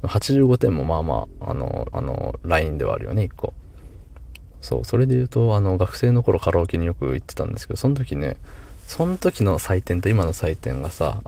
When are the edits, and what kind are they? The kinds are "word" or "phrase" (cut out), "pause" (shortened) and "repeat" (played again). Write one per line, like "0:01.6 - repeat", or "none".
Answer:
0:01.9 - repeat